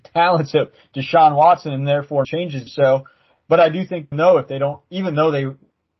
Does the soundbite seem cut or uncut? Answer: cut